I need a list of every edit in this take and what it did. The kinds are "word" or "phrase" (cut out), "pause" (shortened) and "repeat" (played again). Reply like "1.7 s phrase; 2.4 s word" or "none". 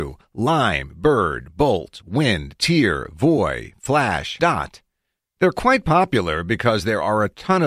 4.4 s phrase

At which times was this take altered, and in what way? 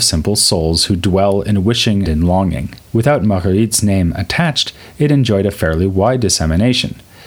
2.1 s word; 2.9 s pause

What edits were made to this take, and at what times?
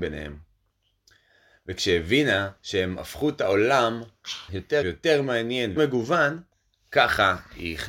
2.6 s pause; 4.5 s word; 4.8 s word; 5.8 s word; 6.5 s pause

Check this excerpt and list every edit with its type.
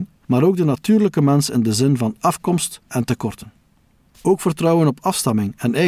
2.9 s word

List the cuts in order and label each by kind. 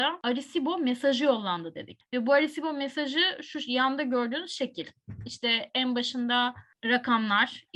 none

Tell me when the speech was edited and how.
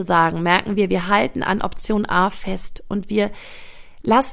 none

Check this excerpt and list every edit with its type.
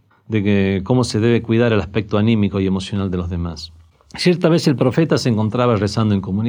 none

